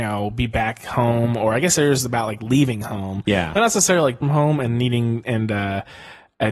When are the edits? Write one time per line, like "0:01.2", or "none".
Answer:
0:04.2